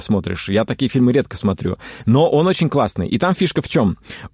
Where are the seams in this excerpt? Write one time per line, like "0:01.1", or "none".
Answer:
none